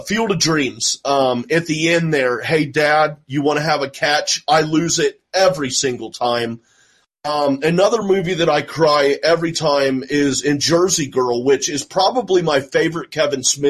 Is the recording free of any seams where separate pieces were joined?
yes; 0 cuts

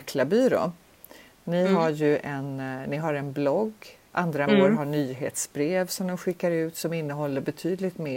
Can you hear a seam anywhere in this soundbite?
yes; 1 cut; at 4.5 s

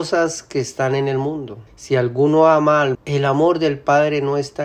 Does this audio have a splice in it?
yes; 2 cuts; at 1.7 s, 2.9 s

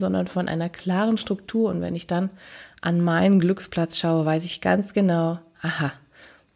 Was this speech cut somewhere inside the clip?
no; 0 cuts

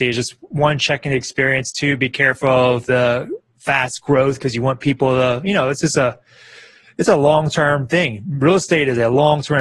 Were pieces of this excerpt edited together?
no; 0 cuts

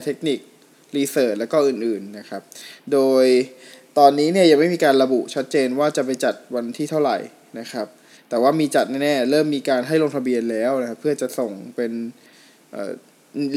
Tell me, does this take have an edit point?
no; 0 cuts

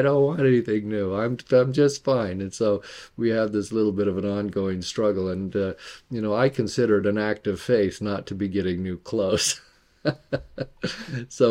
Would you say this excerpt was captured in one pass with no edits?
yes; 0 cuts

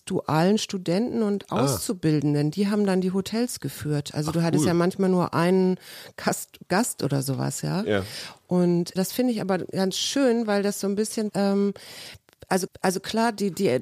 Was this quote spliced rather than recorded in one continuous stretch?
yes; 3 cuts; at 9.0 s, 11.3 s, 12.7 s

